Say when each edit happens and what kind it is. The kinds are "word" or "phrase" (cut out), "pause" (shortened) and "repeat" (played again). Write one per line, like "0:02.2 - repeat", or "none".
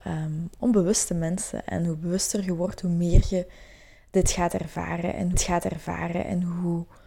0:05.3 - repeat